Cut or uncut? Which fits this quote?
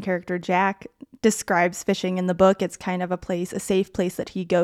uncut